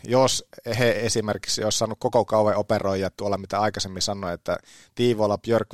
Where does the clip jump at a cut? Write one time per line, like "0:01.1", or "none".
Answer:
none